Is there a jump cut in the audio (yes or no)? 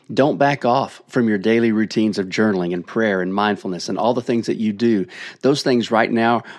no